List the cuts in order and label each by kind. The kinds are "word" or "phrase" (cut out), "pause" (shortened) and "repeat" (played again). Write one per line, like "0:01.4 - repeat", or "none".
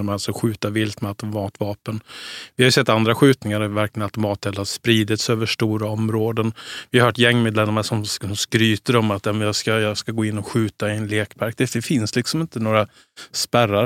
none